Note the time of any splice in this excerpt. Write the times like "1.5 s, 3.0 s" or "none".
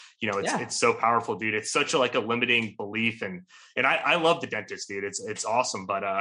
none